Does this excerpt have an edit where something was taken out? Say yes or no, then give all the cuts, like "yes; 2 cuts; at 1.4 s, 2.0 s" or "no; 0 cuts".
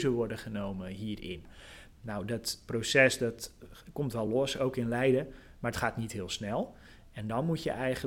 no; 0 cuts